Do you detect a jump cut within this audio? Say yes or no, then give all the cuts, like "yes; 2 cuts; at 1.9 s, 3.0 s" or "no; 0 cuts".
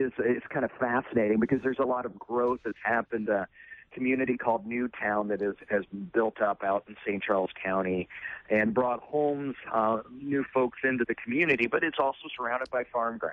yes; 1 cut; at 9.0 s